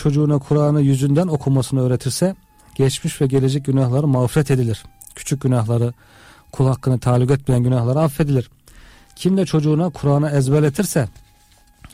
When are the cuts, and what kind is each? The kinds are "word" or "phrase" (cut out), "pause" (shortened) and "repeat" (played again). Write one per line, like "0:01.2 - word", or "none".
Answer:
none